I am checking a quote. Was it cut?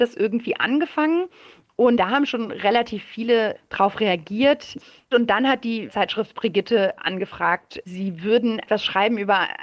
no; 0 cuts

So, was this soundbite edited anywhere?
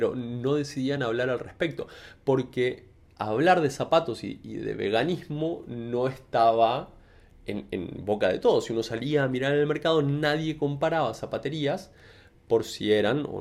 no; 0 cuts

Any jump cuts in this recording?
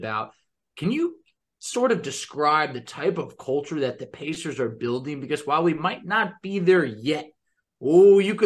no; 0 cuts

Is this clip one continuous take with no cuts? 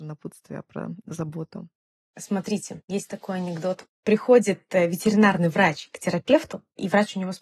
yes; 0 cuts

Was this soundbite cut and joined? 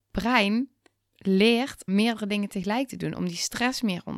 yes; 2 cuts; at 1.1 s, 1.9 s

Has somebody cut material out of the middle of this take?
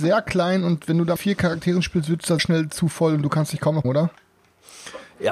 yes; 3 cuts; at 1.2 s, 2.4 s, 3.8 s

